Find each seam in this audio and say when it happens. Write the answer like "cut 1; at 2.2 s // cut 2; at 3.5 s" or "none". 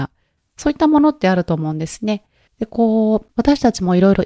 cut 1; at 2.5 s